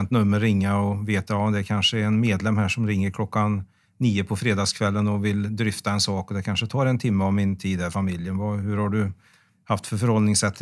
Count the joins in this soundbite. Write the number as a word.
two